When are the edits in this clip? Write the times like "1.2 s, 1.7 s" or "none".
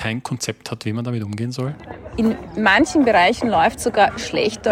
none